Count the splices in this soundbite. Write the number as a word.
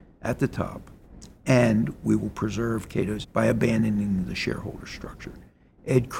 one